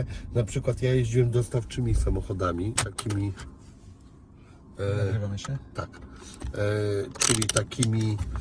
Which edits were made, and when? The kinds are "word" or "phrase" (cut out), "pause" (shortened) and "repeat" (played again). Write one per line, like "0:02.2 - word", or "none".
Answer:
0:02.8 - word